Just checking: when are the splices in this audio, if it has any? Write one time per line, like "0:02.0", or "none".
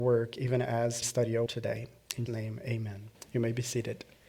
0:01.0
0:01.5
0:02.3
0:03.1